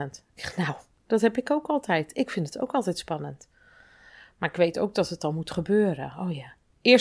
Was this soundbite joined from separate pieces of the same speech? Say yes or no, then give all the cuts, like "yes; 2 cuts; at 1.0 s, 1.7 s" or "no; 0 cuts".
no; 0 cuts